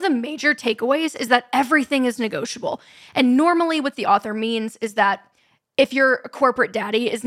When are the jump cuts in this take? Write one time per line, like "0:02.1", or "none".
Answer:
none